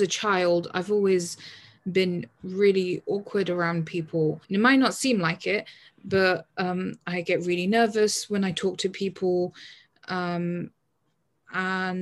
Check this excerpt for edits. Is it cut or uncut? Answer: cut